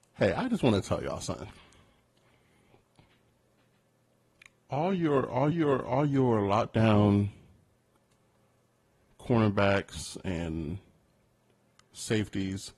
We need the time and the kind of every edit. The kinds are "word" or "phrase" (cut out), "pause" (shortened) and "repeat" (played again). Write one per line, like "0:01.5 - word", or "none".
0:05.5 - repeat